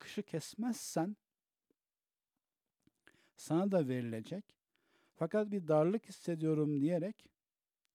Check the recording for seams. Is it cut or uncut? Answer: uncut